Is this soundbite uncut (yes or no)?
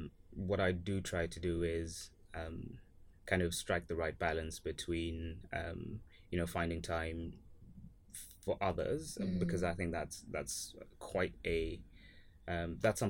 yes